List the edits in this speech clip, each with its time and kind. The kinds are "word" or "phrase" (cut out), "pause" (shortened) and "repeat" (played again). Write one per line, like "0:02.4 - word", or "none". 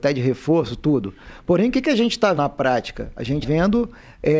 0:02.4 - word
0:03.4 - word